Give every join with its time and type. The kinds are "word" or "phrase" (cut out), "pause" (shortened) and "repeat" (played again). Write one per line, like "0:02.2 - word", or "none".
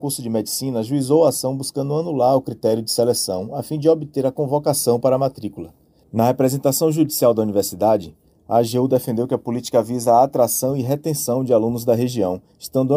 none